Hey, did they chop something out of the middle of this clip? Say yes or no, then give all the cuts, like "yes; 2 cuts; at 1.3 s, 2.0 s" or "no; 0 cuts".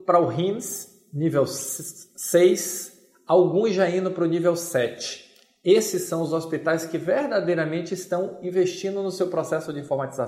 no; 0 cuts